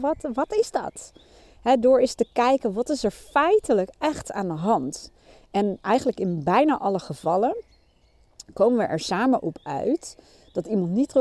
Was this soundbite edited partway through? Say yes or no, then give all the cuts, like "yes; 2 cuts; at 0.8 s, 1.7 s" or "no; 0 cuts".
yes; 1 cut; at 5.8 s